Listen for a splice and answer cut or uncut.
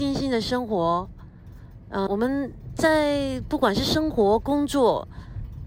cut